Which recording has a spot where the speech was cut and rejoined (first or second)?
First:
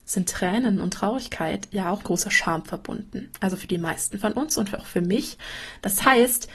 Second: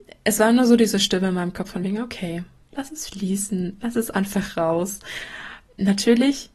first